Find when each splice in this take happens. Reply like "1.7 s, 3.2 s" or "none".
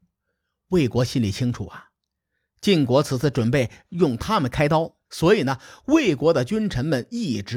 5.0 s